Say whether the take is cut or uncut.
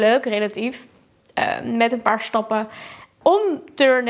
uncut